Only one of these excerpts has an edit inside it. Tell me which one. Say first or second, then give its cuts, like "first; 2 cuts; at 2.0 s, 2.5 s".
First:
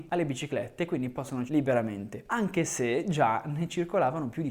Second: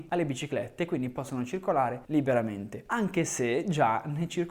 first; 1 cut; at 1.5 s